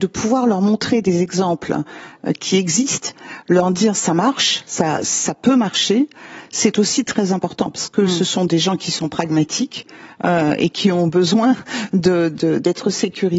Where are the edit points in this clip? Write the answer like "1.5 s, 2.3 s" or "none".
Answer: none